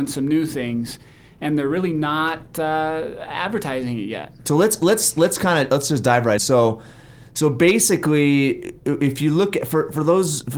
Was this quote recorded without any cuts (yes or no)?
no